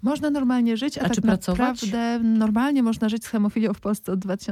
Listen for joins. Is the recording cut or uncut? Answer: uncut